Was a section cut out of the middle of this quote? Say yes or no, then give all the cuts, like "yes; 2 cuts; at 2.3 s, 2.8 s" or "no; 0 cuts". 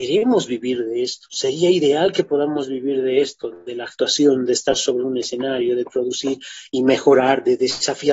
no; 0 cuts